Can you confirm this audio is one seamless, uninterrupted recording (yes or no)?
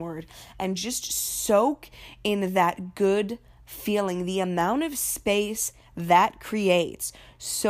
yes